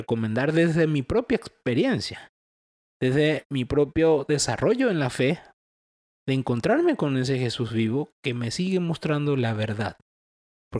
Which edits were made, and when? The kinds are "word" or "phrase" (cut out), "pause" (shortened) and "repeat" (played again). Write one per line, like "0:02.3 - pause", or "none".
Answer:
none